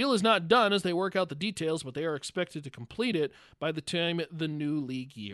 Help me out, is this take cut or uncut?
uncut